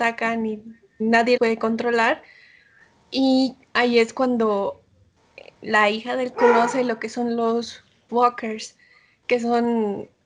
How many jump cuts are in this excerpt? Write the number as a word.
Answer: four